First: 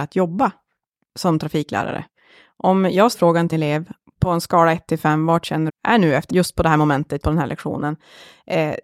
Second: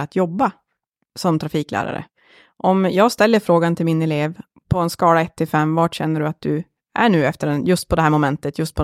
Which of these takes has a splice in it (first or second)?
first